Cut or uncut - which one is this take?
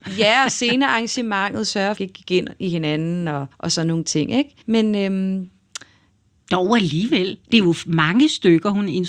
cut